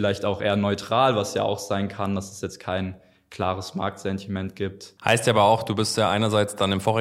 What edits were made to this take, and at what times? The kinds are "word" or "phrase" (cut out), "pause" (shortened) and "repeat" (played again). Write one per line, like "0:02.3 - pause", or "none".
none